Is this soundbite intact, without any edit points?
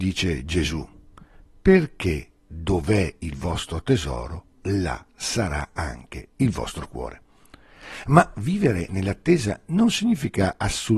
yes; 0 cuts

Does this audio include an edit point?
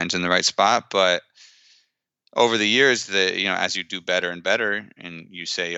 no; 0 cuts

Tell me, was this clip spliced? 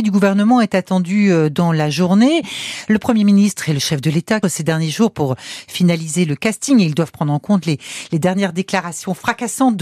yes; 1 cut; at 4.4 s

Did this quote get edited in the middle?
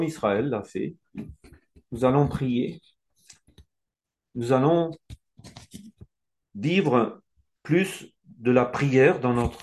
no; 0 cuts

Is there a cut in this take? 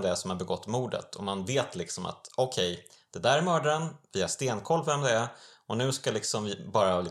no; 0 cuts

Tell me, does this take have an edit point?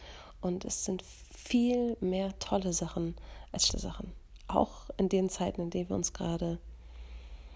yes; 1 cut; at 3.7 s

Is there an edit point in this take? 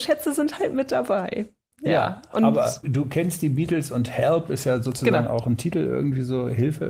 yes; 1 cut; at 2.8 s

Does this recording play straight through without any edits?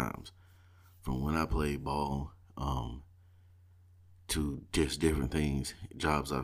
yes; 0 cuts

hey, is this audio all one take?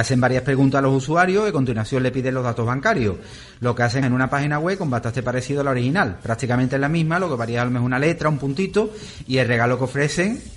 no; 1 cut; at 4.0 s

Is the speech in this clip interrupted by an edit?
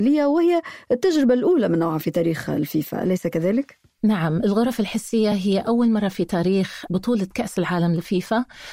no; 0 cuts

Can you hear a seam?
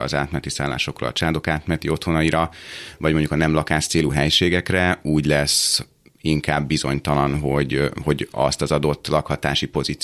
no; 0 cuts

